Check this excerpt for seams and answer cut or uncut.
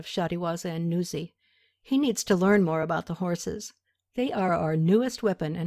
uncut